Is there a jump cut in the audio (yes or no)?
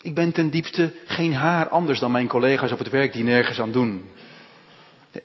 no